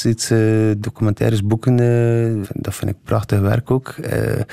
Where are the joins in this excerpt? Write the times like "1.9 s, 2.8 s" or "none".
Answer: 2.4 s